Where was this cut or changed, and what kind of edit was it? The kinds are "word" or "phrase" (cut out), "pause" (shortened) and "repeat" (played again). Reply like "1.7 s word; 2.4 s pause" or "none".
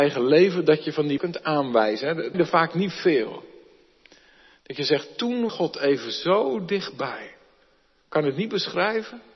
1.2 s word; 2.3 s word; 5.5 s word